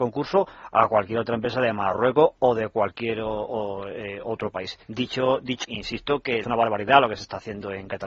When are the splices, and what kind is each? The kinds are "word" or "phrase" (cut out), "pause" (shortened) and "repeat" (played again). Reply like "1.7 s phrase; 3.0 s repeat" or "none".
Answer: 4.8 s pause; 5.6 s word; 6.4 s phrase